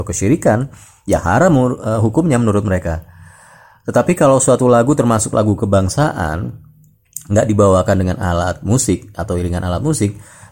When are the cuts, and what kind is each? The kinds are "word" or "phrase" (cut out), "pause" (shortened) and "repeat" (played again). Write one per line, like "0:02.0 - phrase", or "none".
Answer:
none